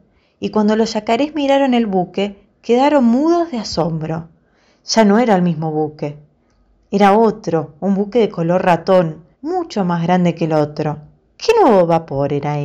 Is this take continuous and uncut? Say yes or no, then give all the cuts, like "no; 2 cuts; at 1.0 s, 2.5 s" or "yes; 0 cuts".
no; 2 cuts; at 9.3 s, 11.3 s